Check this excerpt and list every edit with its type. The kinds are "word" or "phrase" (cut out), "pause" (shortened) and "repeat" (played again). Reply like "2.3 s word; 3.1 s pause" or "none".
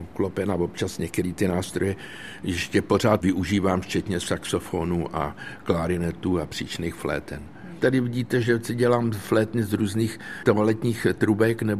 none